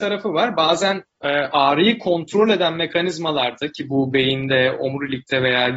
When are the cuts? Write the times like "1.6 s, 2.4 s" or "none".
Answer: none